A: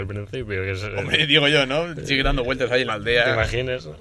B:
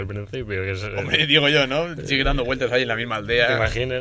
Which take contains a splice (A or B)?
A